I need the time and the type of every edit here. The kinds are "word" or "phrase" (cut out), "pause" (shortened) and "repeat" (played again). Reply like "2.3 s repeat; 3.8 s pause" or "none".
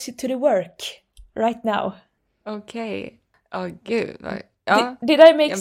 none